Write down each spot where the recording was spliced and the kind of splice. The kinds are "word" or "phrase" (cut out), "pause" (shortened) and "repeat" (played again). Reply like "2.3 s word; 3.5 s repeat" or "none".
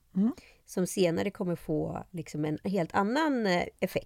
none